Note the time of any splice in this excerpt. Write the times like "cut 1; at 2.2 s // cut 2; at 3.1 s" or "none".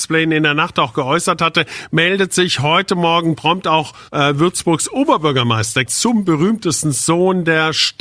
cut 1; at 5.9 s